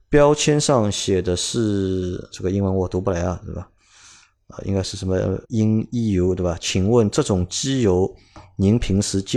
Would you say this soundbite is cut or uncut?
cut